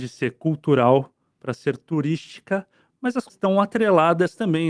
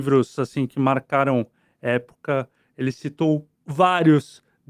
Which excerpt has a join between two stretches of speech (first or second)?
first